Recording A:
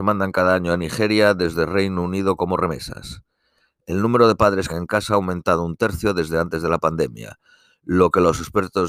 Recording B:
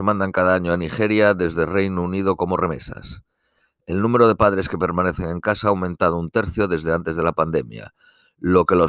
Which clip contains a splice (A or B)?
A